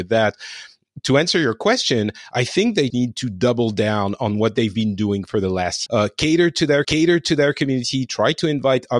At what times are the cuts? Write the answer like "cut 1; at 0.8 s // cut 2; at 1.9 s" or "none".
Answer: cut 1; at 2.9 s // cut 2; at 5.9 s // cut 3; at 6.8 s